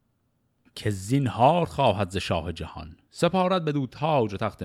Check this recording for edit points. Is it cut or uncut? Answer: uncut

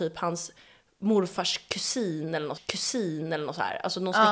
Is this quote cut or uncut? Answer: cut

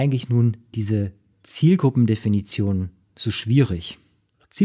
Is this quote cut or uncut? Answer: uncut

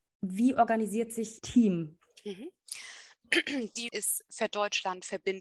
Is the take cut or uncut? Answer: cut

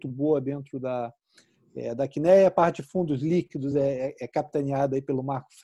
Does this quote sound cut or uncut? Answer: uncut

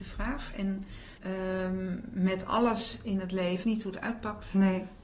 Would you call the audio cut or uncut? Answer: cut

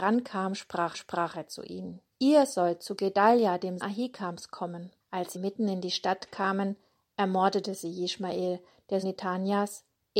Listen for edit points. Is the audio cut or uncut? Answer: cut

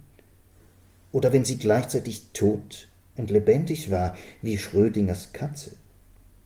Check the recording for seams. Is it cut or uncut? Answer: uncut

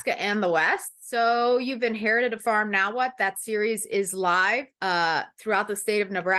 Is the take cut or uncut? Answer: cut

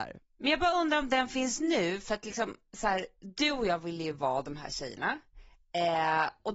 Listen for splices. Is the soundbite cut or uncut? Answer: uncut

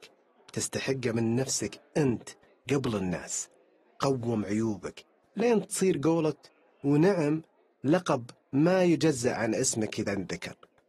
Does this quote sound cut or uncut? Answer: uncut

